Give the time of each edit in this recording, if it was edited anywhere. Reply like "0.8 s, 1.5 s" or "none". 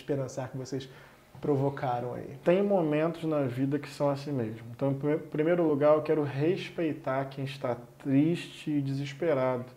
none